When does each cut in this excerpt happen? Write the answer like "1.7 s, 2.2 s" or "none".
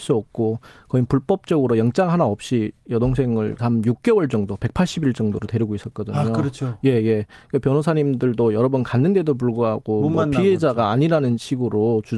3.6 s